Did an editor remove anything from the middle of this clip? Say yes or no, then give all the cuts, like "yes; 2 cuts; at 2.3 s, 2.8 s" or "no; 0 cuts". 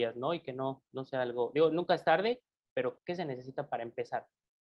yes; 1 cut; at 3.0 s